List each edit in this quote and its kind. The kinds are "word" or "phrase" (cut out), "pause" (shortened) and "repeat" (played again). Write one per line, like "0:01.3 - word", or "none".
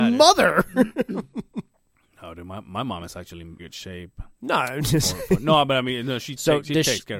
0:03.6 - word
0:04.3 - pause